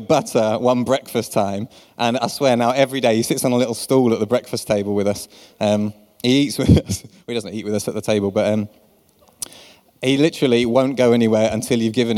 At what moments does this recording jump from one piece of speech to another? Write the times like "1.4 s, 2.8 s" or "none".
none